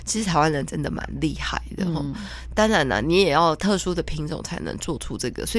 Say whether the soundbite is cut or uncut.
uncut